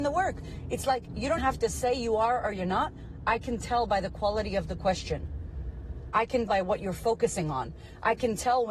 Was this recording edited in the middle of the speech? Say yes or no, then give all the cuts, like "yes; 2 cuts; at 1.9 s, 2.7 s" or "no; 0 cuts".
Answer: yes; 2 cuts; at 1.4 s, 6.5 s